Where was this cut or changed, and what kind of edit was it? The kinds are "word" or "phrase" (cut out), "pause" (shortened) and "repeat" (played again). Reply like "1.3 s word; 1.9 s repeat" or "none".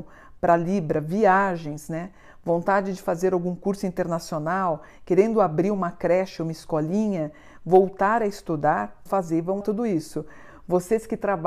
9.1 s word; 9.6 s word